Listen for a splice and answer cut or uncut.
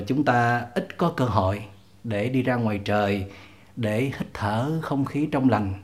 uncut